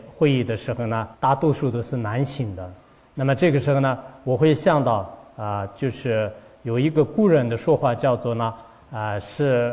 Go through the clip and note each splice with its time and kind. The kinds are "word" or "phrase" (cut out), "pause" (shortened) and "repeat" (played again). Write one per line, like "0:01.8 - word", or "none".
0:01.1 - pause